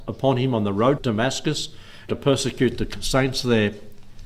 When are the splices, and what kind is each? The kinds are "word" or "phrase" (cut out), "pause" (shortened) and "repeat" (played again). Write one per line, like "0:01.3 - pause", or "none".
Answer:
0:01.0 - word
0:02.1 - word